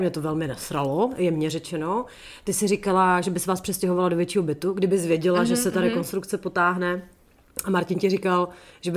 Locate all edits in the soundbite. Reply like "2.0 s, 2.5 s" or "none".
none